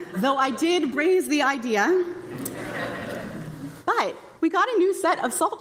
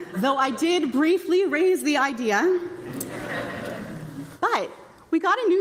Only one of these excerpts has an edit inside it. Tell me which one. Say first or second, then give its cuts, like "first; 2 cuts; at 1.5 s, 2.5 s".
first; 2 cuts; at 0.9 s, 4.4 s